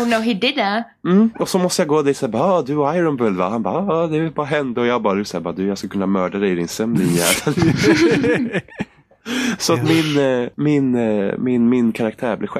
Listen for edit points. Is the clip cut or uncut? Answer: cut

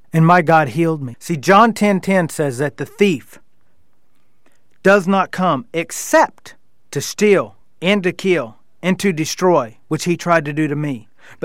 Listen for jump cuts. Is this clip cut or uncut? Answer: uncut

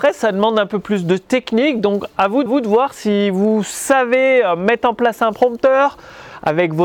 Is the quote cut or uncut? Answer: cut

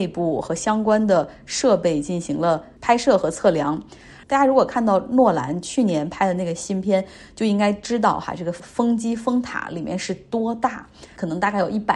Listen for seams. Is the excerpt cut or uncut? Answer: uncut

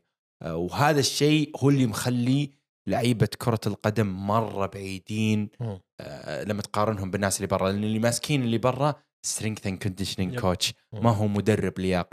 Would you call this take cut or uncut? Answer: uncut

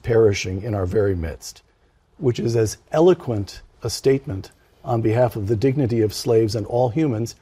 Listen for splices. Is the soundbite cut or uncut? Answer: uncut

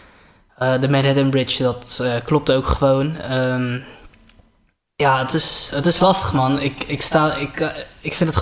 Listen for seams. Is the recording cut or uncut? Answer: uncut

